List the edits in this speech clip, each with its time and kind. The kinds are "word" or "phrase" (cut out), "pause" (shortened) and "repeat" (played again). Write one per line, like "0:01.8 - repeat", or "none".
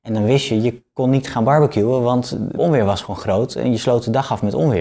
0:02.5 - phrase